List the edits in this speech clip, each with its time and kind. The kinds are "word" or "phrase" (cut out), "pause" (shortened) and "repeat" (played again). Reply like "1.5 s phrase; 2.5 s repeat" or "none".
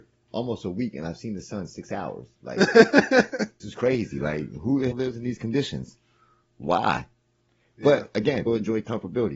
3.6 s word; 4.9 s word; 8.5 s word

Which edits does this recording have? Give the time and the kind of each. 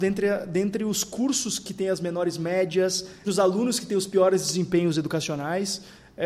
3.2 s word

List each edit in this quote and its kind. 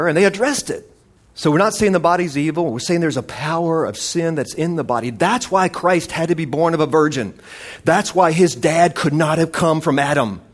1.2 s pause

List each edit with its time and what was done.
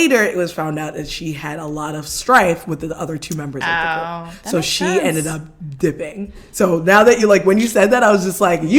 none

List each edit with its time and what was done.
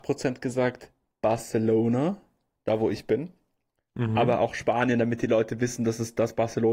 none

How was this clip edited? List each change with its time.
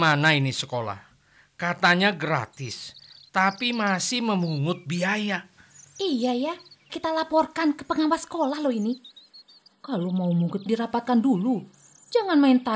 6.9 s word; 10.7 s phrase

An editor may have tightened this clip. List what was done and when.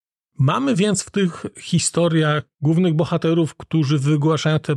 2.5 s pause

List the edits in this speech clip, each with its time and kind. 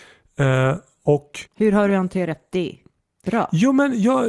1.5 s pause

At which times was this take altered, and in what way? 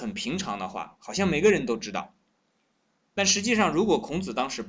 none

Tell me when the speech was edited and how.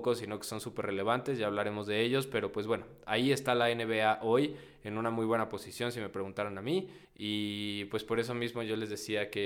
7.0 s pause

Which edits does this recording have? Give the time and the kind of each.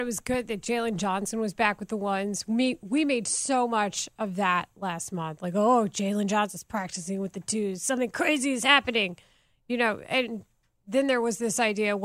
none

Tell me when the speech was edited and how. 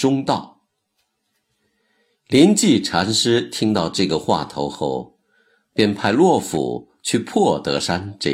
none

